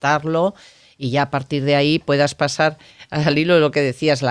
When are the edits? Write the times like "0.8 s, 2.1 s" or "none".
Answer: none